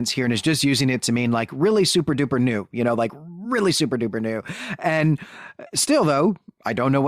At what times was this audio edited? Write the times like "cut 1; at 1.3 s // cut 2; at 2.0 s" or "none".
none